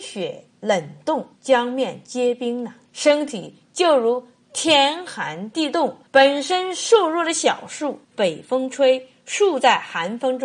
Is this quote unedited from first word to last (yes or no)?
no